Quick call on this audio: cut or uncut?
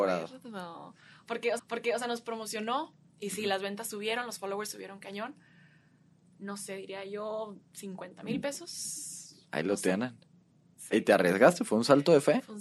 cut